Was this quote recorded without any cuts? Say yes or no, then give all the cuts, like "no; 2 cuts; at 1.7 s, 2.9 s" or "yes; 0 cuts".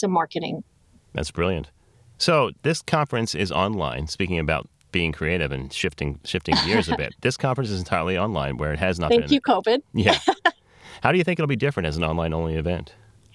no; 1 cut; at 2.6 s